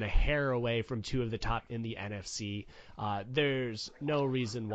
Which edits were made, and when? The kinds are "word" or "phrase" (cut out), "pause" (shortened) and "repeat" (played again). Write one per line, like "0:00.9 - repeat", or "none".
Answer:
0:01.0 - word
0:01.7 - word